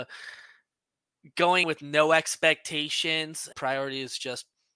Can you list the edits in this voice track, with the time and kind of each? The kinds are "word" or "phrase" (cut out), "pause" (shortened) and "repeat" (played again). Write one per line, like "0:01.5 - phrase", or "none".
0:01.6 - word
0:03.5 - phrase